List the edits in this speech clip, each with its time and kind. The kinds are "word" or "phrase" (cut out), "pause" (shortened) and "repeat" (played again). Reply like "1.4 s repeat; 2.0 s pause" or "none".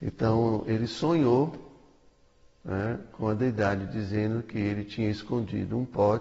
none